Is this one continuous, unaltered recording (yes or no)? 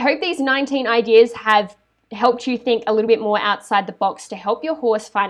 yes